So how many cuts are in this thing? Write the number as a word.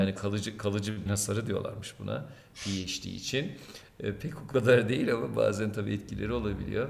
one